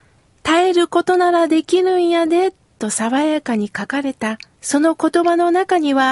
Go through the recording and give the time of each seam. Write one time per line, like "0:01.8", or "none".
0:04.5